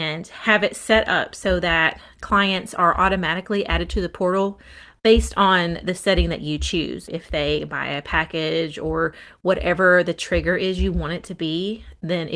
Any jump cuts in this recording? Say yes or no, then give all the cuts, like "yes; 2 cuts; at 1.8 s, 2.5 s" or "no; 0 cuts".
no; 0 cuts